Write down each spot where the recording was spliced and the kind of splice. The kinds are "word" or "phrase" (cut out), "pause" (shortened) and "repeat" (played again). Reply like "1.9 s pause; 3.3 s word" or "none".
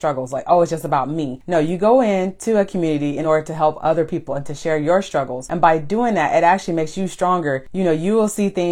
none